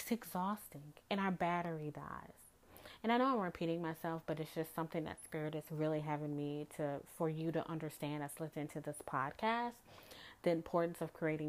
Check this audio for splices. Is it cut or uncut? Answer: uncut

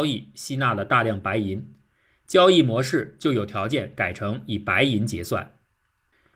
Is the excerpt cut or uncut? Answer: uncut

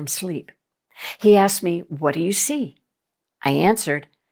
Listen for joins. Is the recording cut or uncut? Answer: uncut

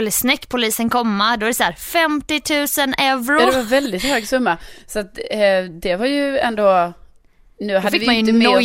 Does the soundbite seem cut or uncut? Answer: uncut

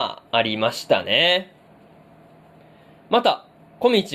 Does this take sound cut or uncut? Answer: uncut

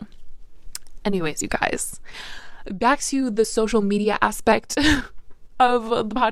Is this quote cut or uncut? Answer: uncut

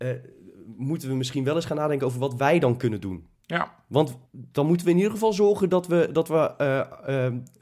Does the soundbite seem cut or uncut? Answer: cut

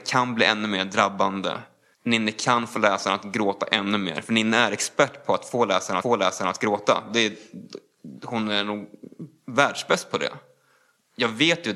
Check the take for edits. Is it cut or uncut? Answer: cut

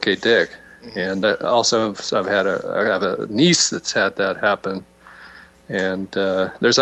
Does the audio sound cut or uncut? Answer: uncut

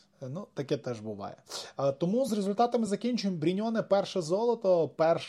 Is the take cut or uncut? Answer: uncut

